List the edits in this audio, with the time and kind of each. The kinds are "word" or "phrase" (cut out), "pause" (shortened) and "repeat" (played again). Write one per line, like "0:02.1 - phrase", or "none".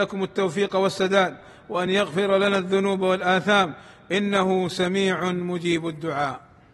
none